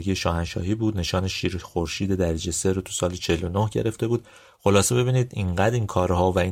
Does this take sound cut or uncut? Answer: uncut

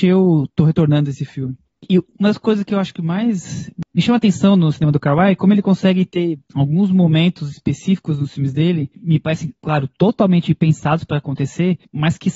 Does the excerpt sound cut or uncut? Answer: uncut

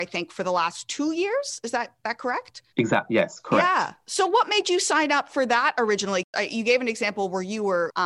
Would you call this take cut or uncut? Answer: cut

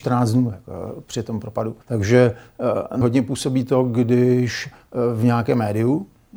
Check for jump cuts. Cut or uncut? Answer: cut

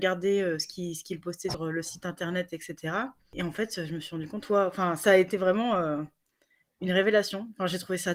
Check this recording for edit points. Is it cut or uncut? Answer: uncut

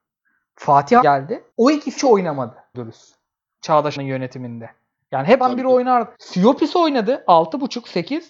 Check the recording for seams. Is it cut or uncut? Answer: cut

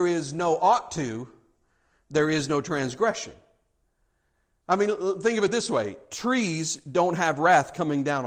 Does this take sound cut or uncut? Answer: uncut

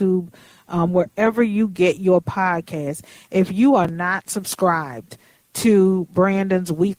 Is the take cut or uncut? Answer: uncut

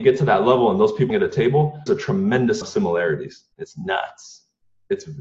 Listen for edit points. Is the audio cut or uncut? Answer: cut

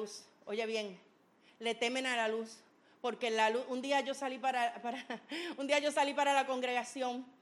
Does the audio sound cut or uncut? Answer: uncut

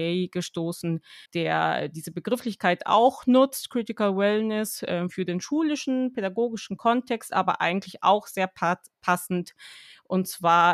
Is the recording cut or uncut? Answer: cut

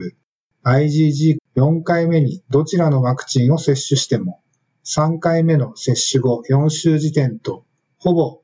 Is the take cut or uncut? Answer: cut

